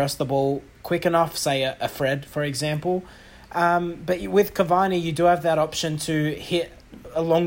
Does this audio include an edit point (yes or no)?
no